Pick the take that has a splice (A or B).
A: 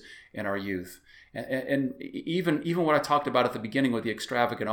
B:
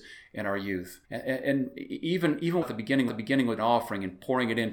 B